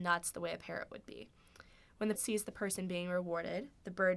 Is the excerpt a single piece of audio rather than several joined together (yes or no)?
no